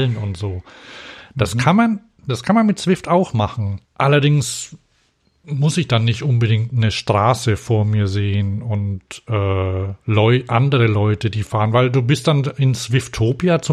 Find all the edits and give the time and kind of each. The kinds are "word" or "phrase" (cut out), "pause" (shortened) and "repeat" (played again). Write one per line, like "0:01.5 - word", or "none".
0:03.8 - pause
0:10.0 - pause